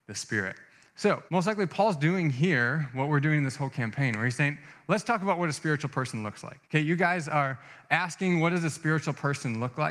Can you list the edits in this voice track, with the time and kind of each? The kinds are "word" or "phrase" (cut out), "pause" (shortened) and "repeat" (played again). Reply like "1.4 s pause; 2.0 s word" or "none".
1.3 s pause; 6.6 s pause